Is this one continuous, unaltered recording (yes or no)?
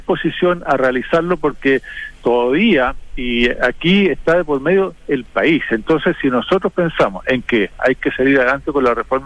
yes